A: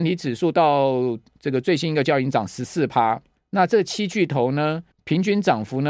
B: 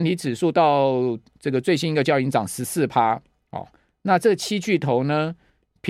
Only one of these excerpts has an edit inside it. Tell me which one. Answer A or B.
A